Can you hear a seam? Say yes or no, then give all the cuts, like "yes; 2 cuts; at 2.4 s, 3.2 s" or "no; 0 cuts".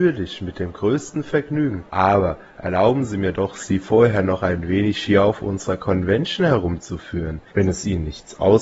yes; 2 cuts; at 1.9 s, 7.5 s